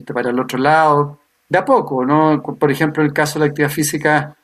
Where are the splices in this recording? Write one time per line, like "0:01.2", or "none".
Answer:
0:01.3

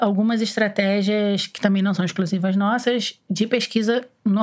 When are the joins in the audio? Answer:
none

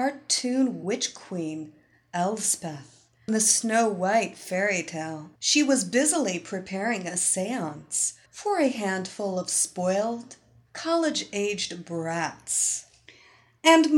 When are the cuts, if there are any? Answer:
0:03.3
0:05.4
0:08.3
0:10.7

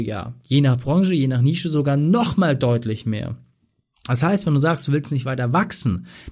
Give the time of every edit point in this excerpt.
none

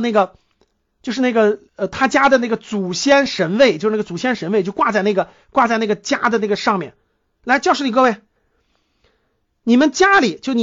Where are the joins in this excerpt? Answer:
0:01.7

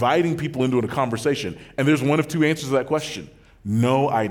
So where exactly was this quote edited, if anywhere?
none

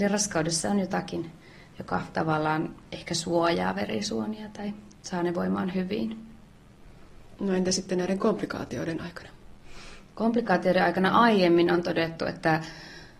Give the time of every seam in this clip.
none

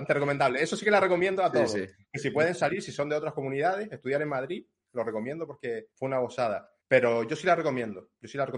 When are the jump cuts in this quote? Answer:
0:05.9
0:06.8

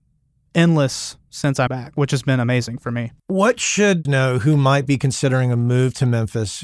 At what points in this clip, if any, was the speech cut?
0:01.7
0:03.2
0:04.0

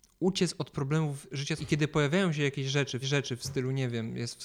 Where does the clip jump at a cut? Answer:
0:01.6
0:03.0

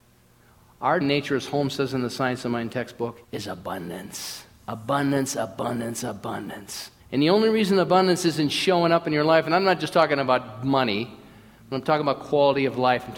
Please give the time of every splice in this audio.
0:01.0
0:03.2
0:07.0

